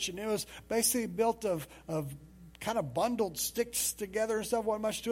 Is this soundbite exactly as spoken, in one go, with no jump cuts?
no; 1 cut; at 2.5 s

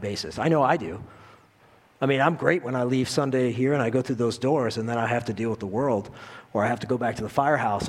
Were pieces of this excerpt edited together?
no; 0 cuts

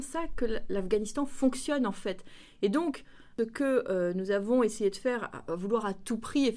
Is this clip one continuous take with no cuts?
yes; 0 cuts

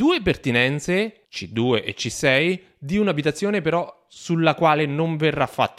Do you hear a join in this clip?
yes; 1 cut; at 1.2 s

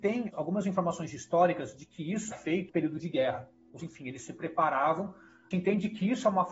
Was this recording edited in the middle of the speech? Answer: yes; 4 cuts; at 2.3 s, 2.7 s, 3.8 s, 5.5 s

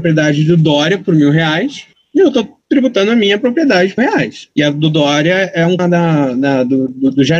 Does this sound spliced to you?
yes; 5 cuts; at 1.9 s, 2.6 s, 4.0 s, 4.5 s, 5.8 s

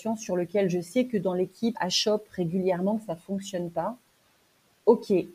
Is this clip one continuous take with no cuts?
no; 1 cut; at 1.7 s

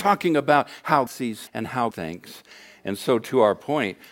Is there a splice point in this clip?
yes; 3 cuts; at 1.1 s, 1.5 s, 1.9 s

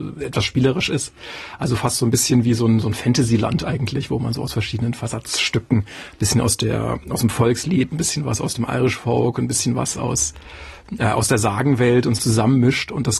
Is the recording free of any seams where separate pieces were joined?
no; 1 cut; at 12.2 s

